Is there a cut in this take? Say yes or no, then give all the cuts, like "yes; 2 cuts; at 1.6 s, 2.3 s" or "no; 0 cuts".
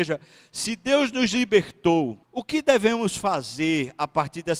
yes; 1 cut; at 2.2 s